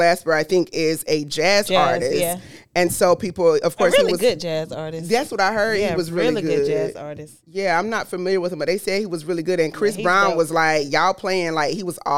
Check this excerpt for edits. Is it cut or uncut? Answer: uncut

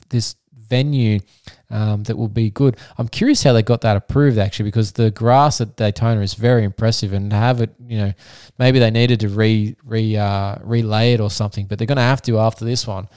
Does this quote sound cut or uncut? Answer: uncut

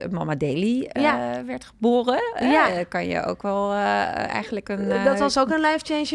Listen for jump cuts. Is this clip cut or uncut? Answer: uncut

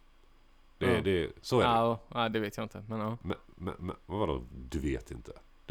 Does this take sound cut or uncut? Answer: uncut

